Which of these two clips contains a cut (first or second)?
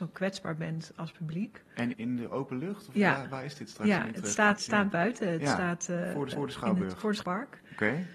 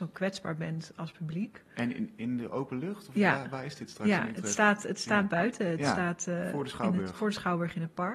first